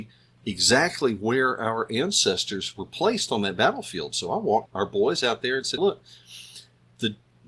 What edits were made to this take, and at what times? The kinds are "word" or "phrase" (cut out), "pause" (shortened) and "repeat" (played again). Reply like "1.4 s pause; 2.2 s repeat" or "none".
4.7 s word; 5.8 s word